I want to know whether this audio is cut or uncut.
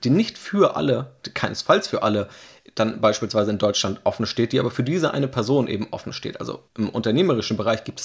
cut